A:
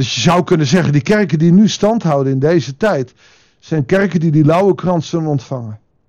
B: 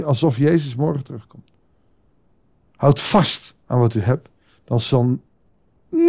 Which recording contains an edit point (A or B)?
B